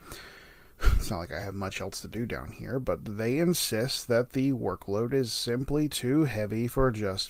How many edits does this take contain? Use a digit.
0